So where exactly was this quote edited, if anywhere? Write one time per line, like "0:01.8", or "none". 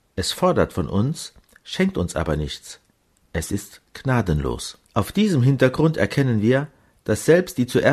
0:04.8